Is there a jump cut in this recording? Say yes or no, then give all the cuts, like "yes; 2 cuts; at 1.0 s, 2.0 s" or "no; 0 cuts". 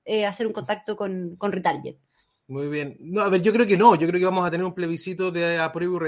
no; 0 cuts